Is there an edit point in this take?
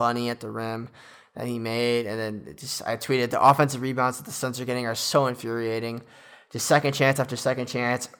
no; 0 cuts

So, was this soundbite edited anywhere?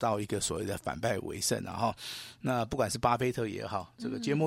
no; 0 cuts

